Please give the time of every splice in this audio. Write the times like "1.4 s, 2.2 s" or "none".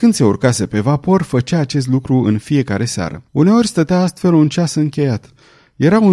3.3 s